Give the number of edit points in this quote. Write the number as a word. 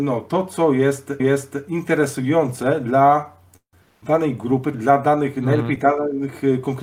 two